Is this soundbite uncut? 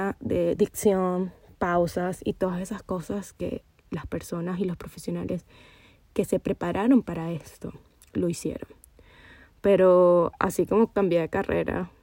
yes; 0 cuts

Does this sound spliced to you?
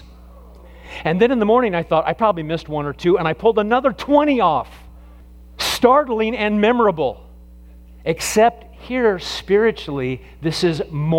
no; 0 cuts

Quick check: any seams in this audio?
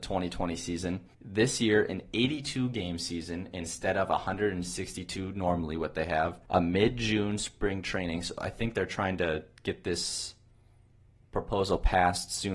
yes; 2 cuts; at 1.1 s, 6.4 s

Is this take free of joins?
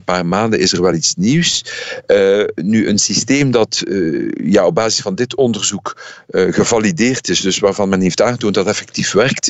yes; 0 cuts

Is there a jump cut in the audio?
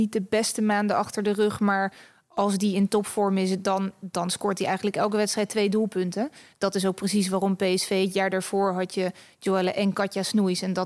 no; 0 cuts

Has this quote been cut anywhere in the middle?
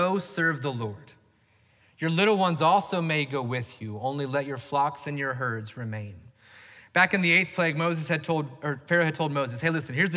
no; 0 cuts

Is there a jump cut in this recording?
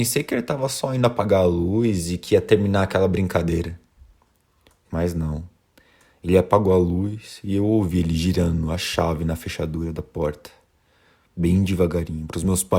no; 0 cuts

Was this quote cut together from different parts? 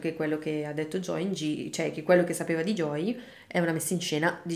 no; 0 cuts

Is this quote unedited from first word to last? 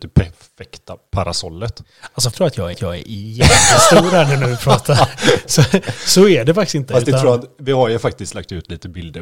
no; 2 cuts; at 2.3 s, 2.7 s

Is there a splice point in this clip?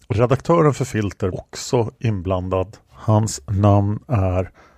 yes; 2 cuts; at 1.3 s, 2.8 s

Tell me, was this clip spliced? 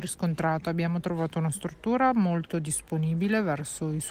no; 0 cuts

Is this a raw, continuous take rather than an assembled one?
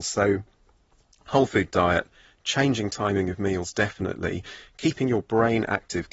yes; 0 cuts

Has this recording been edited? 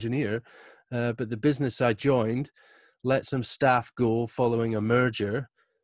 no; 0 cuts

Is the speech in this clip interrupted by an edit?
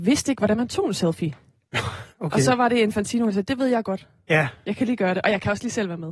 yes; 1 cut; at 2.1 s

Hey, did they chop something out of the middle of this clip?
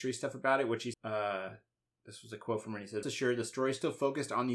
yes; 2 cuts; at 0.9 s, 3.0 s

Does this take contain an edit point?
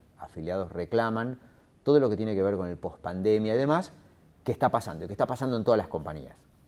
no; 0 cuts

